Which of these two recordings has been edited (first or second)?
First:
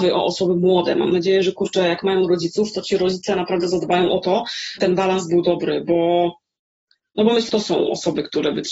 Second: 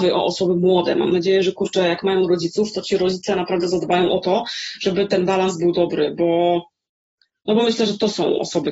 first